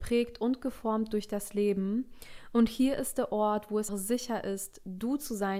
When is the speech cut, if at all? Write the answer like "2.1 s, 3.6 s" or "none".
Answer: 3.9 s